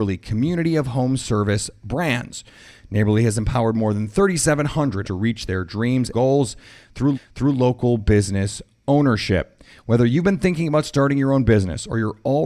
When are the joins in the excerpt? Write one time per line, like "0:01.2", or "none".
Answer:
0:05.0
0:06.1
0:07.1